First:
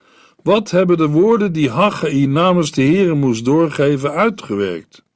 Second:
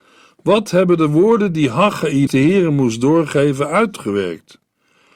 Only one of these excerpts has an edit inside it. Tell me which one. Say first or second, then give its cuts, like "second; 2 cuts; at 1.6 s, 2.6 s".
second; 1 cut; at 2.3 s